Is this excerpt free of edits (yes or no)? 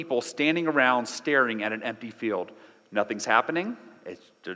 yes